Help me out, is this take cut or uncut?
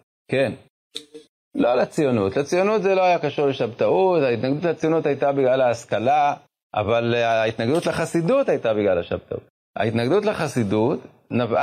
uncut